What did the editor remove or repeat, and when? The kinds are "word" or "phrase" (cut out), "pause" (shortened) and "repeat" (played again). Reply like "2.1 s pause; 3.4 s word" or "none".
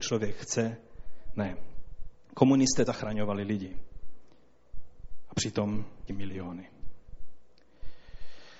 1.4 s word; 2.9 s word; 6.1 s phrase